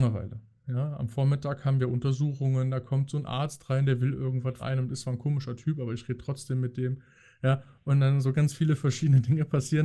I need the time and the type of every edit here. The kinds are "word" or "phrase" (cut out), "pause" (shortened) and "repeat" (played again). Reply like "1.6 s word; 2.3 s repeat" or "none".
4.6 s word; 8.3 s word